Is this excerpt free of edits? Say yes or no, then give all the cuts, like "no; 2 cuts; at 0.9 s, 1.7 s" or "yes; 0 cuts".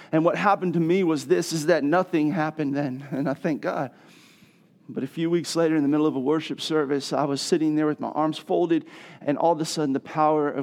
yes; 0 cuts